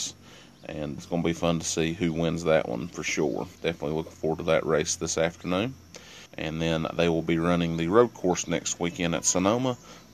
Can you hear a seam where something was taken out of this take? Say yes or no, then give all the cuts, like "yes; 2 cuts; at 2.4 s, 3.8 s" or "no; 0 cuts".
yes; 3 cuts; at 1.0 s, 3.6 s, 6.3 s